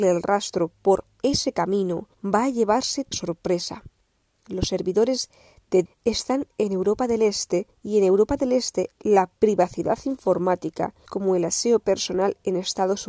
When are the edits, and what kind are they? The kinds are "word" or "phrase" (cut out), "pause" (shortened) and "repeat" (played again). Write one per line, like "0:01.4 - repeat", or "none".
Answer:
0:02.1 - pause
0:03.1 - phrase
0:05.9 - word
0:07.7 - pause
0:09.4 - pause
0:11.1 - word